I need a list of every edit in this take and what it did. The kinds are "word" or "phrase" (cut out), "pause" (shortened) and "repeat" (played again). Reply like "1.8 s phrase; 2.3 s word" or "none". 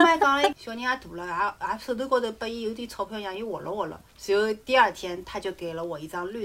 4.1 s pause; 4.6 s pause